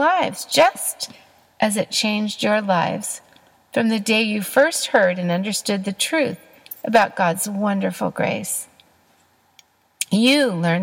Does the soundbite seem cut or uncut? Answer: uncut